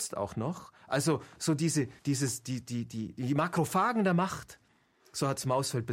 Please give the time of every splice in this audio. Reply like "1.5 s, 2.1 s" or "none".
2.0 s